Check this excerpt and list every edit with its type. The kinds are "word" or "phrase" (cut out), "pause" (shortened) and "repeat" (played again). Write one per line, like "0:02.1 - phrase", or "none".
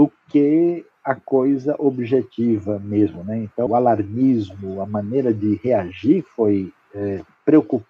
0:03.7 - word